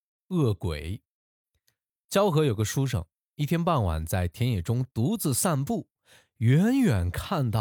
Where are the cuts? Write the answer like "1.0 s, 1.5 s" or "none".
none